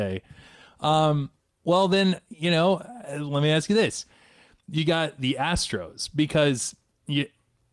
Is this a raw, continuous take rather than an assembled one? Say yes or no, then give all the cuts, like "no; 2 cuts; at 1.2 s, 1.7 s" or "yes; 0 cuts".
yes; 0 cuts